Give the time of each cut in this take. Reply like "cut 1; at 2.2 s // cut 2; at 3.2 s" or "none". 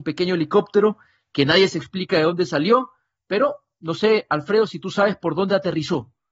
none